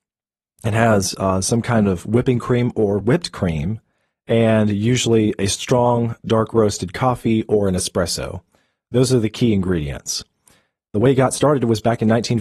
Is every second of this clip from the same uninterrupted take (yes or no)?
yes